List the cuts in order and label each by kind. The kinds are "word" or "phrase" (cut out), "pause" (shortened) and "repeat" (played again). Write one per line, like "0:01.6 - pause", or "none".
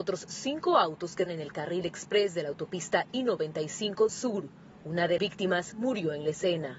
0:01.3 - word
0:04.1 - word
0:05.2 - word